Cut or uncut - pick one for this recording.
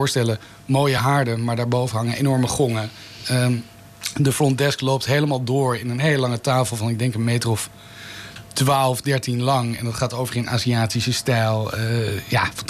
uncut